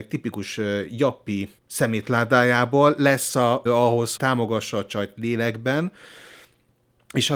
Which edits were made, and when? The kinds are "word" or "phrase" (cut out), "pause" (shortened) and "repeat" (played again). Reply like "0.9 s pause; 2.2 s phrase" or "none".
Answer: 1.6 s pause; 3.7 s word; 4.2 s word